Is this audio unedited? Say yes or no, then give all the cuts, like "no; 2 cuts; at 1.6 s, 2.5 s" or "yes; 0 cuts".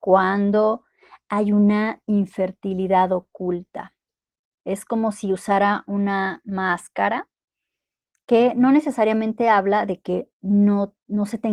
yes; 0 cuts